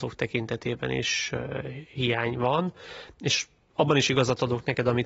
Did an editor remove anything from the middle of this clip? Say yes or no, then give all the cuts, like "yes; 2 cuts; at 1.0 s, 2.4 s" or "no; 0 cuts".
no; 0 cuts